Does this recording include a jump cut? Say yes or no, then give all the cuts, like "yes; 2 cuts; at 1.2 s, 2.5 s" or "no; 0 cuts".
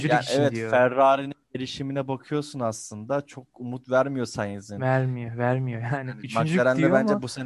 no; 0 cuts